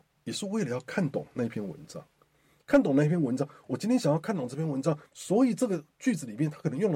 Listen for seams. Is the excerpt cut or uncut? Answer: uncut